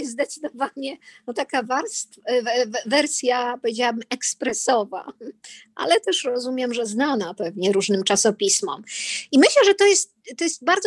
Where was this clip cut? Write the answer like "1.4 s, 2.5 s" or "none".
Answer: none

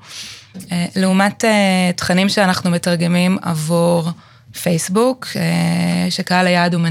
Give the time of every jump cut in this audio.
none

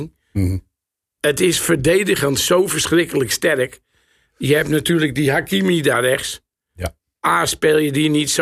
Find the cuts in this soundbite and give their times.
none

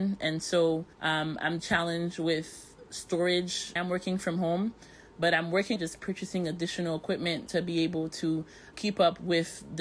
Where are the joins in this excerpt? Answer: 0.9 s, 1.6 s, 3.8 s, 5.8 s, 7.5 s, 8.7 s

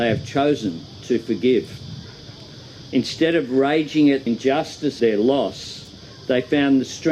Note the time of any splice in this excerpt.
4.3 s, 5.0 s

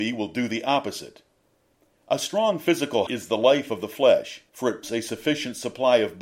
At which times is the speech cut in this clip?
1.5 s, 3.1 s, 4.5 s, 4.8 s

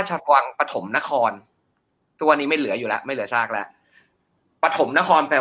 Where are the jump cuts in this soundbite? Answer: none

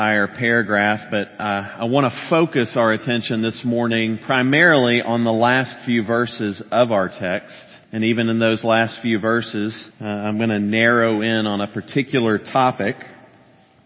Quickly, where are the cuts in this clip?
7.8 s, 9.9 s

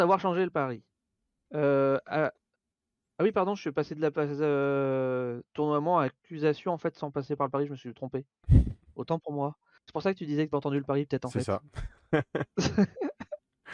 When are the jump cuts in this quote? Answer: 10.5 s

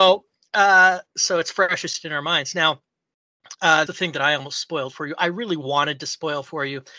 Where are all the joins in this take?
3.9 s

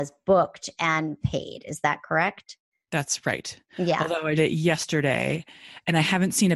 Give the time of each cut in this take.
4.4 s

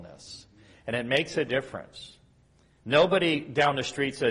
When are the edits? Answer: none

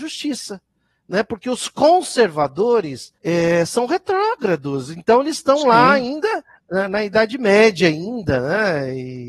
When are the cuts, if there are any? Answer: 3.2 s, 6.6 s

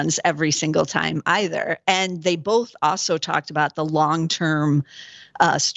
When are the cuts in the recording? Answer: none

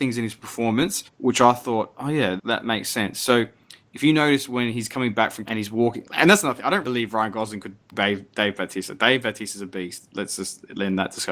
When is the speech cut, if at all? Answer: 1.1 s, 2.4 s, 5.5 s, 6.8 s, 7.9 s

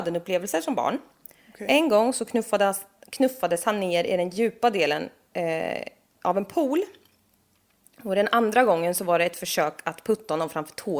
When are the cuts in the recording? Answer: none

